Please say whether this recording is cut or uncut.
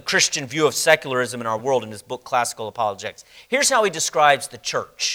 uncut